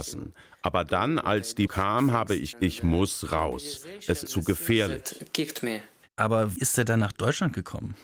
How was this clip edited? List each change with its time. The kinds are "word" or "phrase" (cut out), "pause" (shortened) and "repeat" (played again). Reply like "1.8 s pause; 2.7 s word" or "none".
1.7 s word; 2.5 s word; 4.3 s word; 6.6 s word